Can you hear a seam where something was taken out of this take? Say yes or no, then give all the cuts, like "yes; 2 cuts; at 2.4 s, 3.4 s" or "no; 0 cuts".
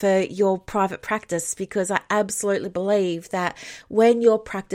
no; 0 cuts